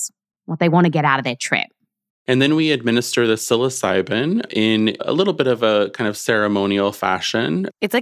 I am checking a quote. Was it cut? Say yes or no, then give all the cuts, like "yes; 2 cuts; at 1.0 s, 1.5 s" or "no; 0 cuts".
no; 0 cuts